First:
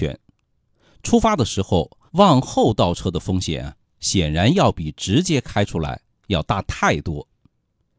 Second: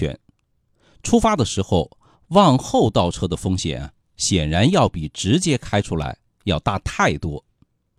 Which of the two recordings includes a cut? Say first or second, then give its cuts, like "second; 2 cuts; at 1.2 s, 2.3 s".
first; 1 cut; at 2.1 s